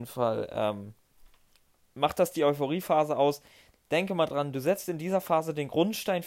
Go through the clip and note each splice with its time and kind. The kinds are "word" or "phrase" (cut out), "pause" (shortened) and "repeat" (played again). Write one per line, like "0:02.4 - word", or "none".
none